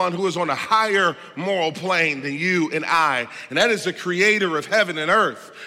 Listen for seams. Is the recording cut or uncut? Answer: uncut